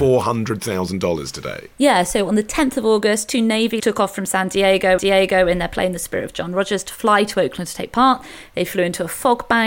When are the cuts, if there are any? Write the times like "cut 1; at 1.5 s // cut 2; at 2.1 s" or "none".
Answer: cut 1; at 1.7 s // cut 2; at 3.8 s // cut 3; at 5.0 s